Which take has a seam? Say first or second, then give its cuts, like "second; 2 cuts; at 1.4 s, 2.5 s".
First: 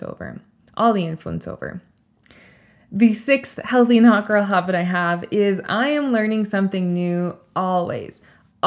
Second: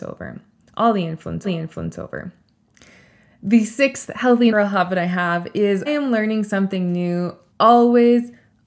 second; 4 cuts; at 1.4 s, 4.5 s, 5.9 s, 7.5 s